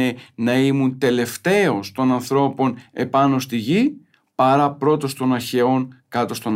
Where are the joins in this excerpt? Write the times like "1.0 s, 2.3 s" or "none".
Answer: none

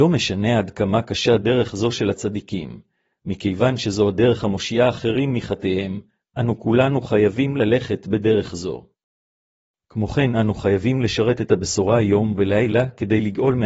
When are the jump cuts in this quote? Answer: none

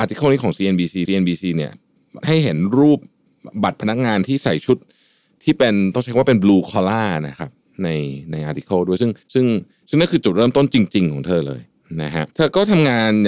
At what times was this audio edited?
1.0 s, 9.2 s, 12.3 s

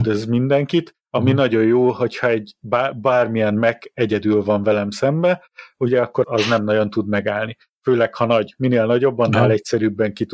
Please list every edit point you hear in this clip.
6.2 s

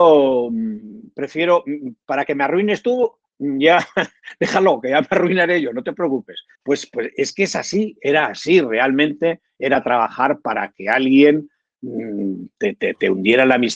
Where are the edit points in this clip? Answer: 6.5 s

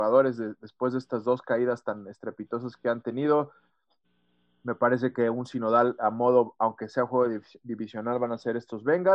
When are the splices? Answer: none

